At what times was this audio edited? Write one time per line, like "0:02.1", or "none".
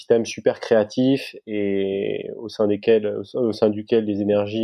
none

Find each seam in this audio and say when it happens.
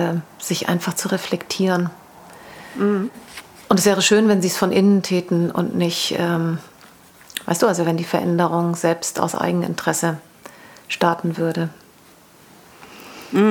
none

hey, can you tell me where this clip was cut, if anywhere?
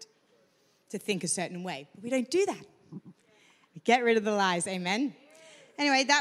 none

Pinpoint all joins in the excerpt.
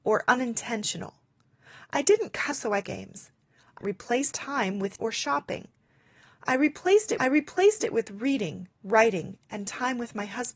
0:02.5
0:02.8
0:03.8
0:04.3
0:05.0
0:07.2
0:08.7

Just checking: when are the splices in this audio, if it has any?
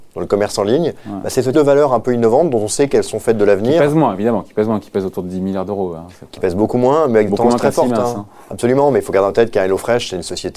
0:01.5

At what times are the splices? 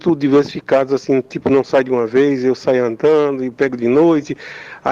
none

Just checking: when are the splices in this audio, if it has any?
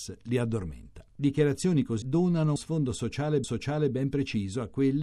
0:02.0
0:02.6
0:03.4

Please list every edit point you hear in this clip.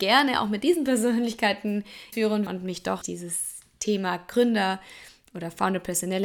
0:02.1
0:02.5
0:03.0

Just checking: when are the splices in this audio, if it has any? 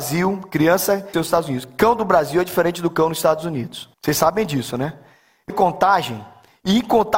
0:01.1
0:03.9
0:05.5

